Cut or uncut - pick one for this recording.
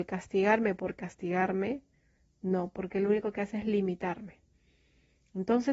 uncut